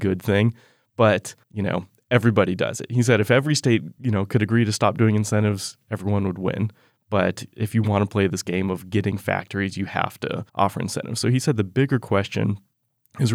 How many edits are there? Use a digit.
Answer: 2